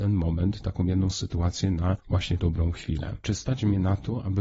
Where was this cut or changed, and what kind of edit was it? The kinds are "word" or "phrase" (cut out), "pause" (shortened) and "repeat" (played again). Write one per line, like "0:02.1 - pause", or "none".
0:02.4 - word